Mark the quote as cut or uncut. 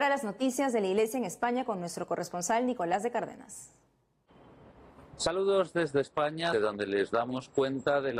cut